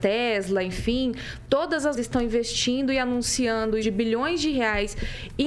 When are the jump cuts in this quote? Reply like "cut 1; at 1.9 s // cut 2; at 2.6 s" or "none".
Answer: cut 1; at 1.9 s // cut 2; at 3.8 s